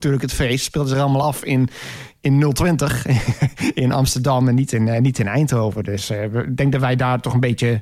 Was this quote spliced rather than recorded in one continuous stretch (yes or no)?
no